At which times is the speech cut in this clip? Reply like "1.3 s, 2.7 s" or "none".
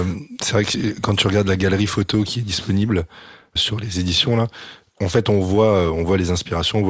3.6 s